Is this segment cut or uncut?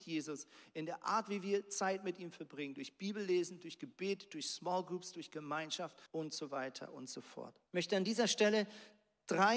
cut